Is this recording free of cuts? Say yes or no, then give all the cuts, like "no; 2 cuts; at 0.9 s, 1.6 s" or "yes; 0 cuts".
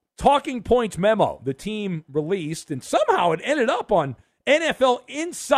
yes; 0 cuts